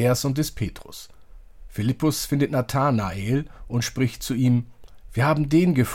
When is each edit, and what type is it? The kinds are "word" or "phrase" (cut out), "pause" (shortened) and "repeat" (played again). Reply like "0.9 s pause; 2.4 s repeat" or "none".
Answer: none

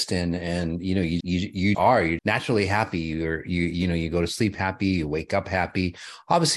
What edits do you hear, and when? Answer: 1.2 s word; 1.7 s word; 2.2 s word

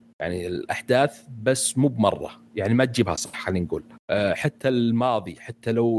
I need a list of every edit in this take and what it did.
3.9 s pause

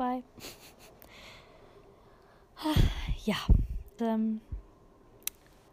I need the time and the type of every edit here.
4.0 s word

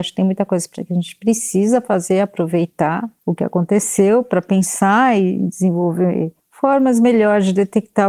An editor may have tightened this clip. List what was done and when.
3.2 s pause; 6.4 s pause

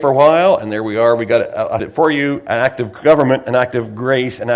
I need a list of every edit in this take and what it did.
1.8 s word

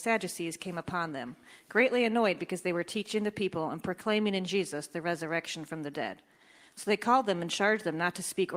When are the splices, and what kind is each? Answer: none

